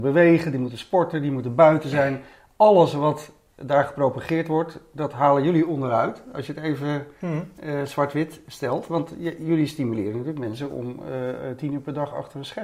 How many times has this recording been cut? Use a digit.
0